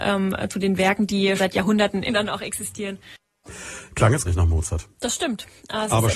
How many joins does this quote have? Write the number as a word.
four